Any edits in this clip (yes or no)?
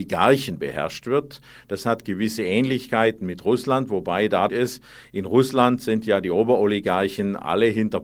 yes